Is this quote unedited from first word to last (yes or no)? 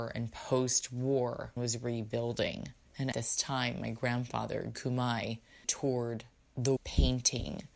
no